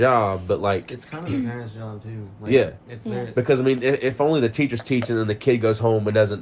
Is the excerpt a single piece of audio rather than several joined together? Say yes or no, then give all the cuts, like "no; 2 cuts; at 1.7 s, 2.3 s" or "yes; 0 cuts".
yes; 0 cuts